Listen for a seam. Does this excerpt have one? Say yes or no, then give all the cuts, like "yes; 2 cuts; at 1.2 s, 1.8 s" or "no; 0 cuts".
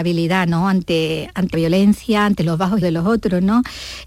yes; 2 cuts; at 1.5 s, 2.8 s